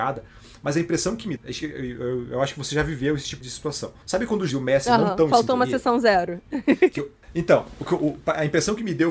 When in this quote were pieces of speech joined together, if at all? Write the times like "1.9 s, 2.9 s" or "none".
1.4 s, 3.4 s, 4.5 s